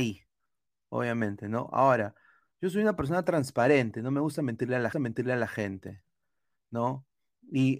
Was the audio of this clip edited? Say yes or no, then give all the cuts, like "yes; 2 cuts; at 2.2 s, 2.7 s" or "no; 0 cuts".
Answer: yes; 1 cut; at 4.9 s